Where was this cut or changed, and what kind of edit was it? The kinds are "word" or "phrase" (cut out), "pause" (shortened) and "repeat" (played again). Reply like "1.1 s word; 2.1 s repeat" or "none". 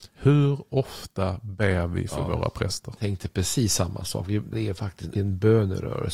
4.5 s word; 5.1 s phrase